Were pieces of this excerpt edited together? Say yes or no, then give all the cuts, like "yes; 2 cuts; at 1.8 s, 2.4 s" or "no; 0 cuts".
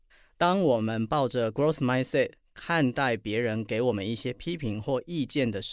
no; 0 cuts